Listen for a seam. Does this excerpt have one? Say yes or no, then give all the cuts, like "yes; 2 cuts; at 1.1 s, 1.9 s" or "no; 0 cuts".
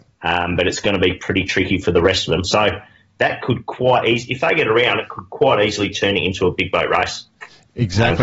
no; 0 cuts